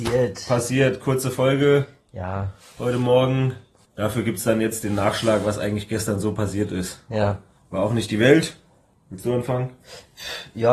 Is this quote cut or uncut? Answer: uncut